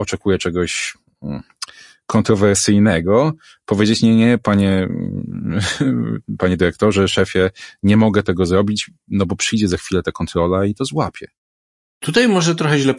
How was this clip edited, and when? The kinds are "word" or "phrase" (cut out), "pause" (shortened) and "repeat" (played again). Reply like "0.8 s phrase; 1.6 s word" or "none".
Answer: none

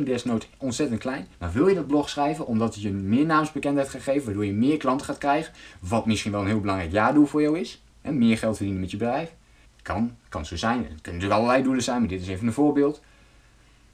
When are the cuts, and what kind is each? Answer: 1.3 s pause; 7.9 s pause; 9.7 s pause

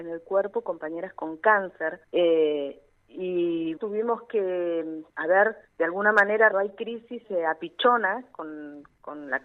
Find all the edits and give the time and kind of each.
2.0 s pause; 3.8 s word; 5.1 s pause; 5.6 s pause; 6.5 s phrase; 7.2 s word

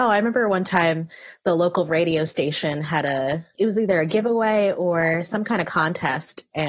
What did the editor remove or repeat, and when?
3.5 s word

